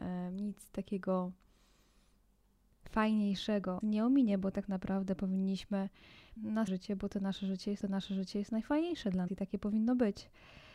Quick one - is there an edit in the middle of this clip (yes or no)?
yes